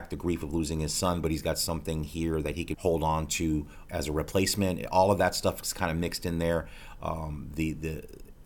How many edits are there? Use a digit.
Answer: 2